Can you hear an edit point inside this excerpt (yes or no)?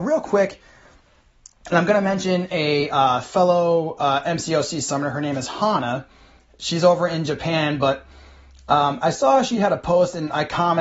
no